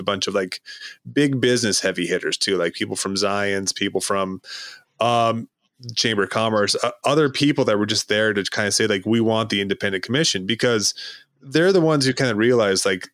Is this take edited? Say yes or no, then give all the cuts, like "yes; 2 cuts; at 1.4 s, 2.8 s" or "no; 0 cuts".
no; 0 cuts